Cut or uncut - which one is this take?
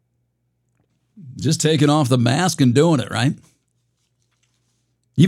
uncut